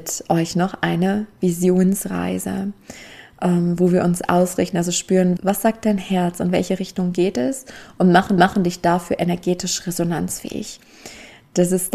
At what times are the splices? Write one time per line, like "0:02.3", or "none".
0:05.4
0:08.4

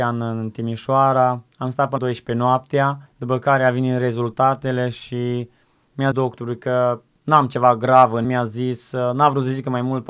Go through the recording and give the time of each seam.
0:01.5
0:02.0
0:03.1
0:06.1
0:08.2

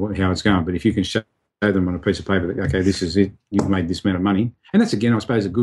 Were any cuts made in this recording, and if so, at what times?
none

